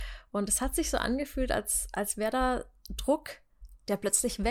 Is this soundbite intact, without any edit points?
yes; 0 cuts

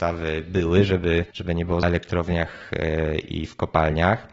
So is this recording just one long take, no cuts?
no; 2 cuts; at 1.3 s, 1.8 s

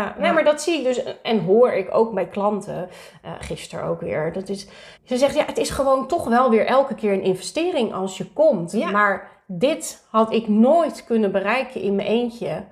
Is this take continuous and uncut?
no; 1 cut; at 4.9 s

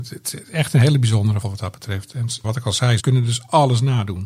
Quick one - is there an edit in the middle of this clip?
yes; 3 cuts; at 1.4 s, 2.4 s, 3.0 s

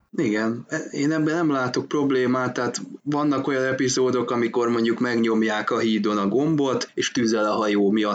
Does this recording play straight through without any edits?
yes; 0 cuts

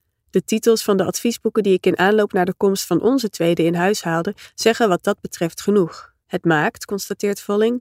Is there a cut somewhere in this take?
yes; 1 cut; at 6.2 s

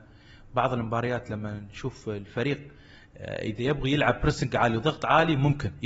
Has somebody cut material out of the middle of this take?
no; 0 cuts

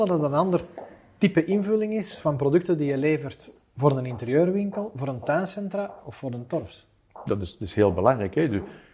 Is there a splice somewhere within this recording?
no; 0 cuts

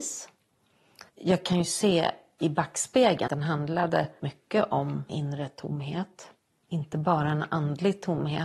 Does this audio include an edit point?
yes; 4 cuts; at 1.1 s, 3.3 s, 4.2 s, 5.1 s

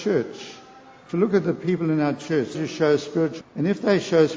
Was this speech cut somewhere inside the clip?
yes; 2 cuts; at 2.5 s, 3.4 s

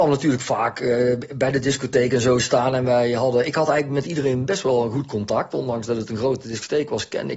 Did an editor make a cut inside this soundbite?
no; 0 cuts

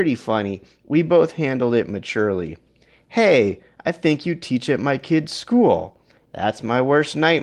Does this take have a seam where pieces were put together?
no; 0 cuts

